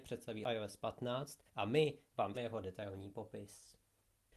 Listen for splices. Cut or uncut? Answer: cut